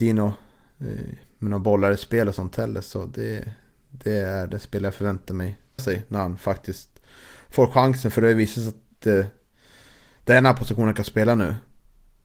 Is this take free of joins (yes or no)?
no